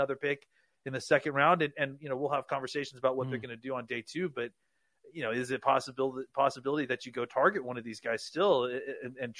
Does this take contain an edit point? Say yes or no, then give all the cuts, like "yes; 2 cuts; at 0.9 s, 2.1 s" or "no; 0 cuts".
no; 0 cuts